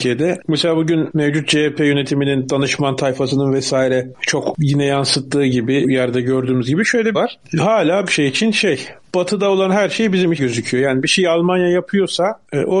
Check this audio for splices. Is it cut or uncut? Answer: cut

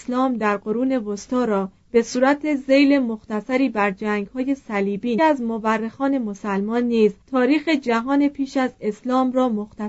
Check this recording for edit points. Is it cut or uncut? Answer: cut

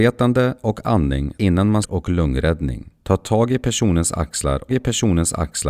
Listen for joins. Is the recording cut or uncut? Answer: cut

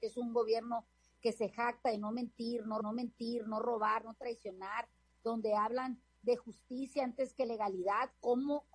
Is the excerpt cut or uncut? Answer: cut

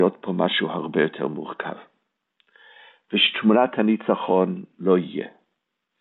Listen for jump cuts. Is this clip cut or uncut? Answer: uncut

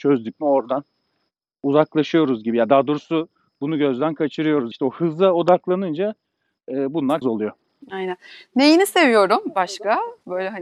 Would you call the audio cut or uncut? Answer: cut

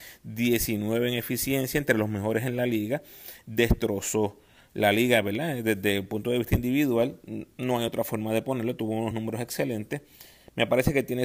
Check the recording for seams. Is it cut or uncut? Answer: uncut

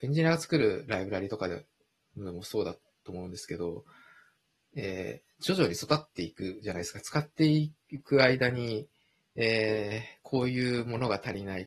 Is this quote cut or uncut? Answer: uncut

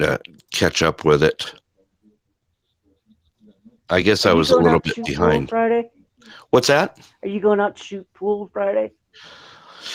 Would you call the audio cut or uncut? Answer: uncut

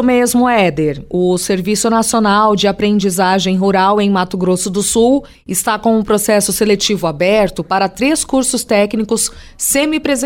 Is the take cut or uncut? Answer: uncut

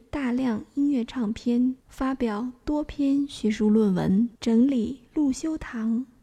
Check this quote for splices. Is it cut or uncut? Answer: cut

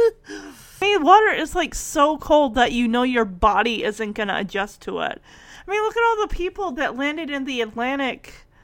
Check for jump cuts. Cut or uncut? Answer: uncut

